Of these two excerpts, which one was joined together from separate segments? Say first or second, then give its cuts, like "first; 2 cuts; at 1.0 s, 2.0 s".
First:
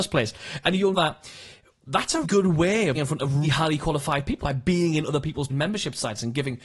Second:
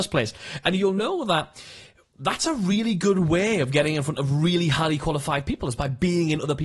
first; 6 cuts; at 0.9 s, 2.2 s, 2.9 s, 3.4 s, 4.4 s, 5.5 s